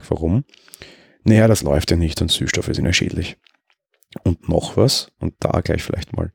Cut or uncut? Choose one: uncut